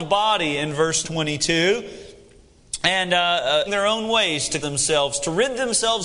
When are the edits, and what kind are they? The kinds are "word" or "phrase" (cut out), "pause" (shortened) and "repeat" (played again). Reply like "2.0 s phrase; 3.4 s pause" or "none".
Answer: 1.0 s word; 3.7 s phrase; 4.6 s word

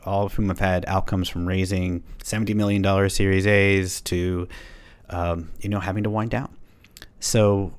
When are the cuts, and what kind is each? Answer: none

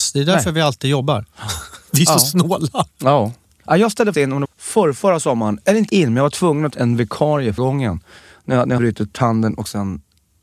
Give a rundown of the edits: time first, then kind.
4.1 s word; 4.4 s word; 5.9 s word; 6.7 s word; 7.6 s word; 8.8 s word; 9.1 s word

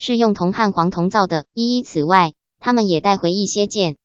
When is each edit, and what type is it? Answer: 1.5 s pause

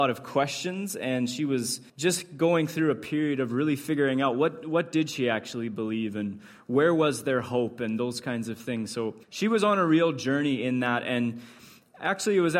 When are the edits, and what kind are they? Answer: 1.9 s pause; 9.2 s pause

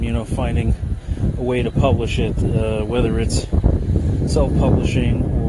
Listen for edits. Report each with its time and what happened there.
none

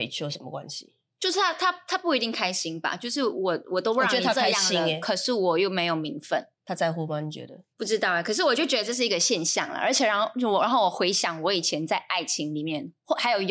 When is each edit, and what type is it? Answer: 6.6 s pause; 7.7 s pause

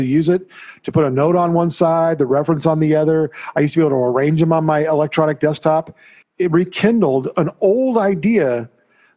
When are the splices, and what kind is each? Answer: 6.2 s pause

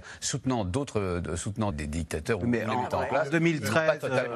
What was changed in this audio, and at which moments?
1.7 s word

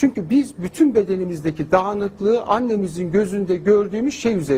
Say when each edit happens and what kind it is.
none

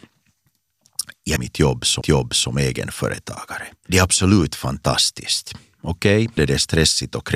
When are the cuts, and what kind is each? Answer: 1.4 s word; 2.0 s repeat; 6.4 s word

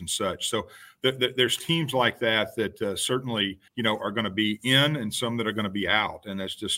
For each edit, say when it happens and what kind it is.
3.7 s pause

